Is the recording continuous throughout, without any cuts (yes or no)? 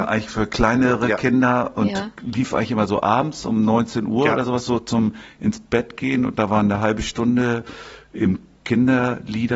yes